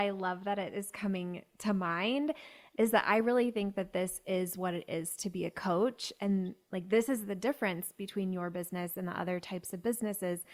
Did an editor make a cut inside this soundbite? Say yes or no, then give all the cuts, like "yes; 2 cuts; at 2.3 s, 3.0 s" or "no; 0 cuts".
no; 0 cuts